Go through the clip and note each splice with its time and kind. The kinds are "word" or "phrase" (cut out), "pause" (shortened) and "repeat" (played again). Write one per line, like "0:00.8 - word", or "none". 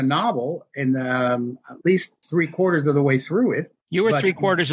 0:02.2 - pause
0:03.8 - pause